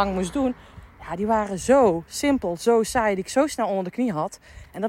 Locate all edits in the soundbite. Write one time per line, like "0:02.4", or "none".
none

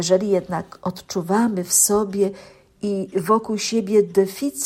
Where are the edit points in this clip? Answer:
none

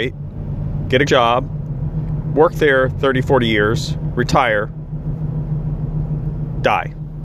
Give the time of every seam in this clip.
0:01.1

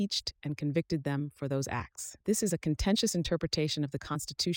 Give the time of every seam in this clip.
0:02.2

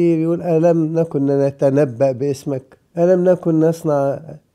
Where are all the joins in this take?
0:02.9

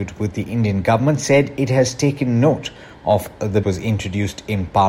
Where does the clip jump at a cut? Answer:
0:03.6

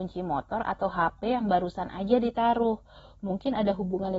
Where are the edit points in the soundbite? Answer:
none

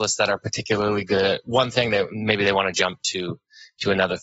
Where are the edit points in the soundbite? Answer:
none

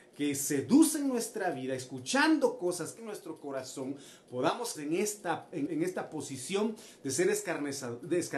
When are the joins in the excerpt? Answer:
0:03.0
0:04.7
0:05.7

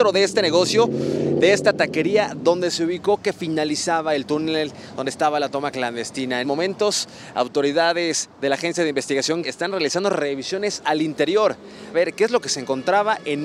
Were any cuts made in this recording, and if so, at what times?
0:06.4
0:09.4
0:11.9

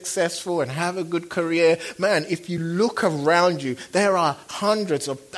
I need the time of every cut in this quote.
none

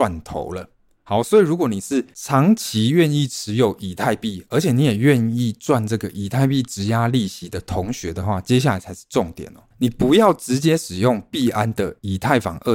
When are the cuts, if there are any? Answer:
0:09.7

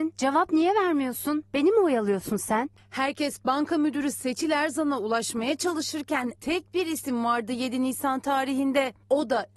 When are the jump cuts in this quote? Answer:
0:06.4

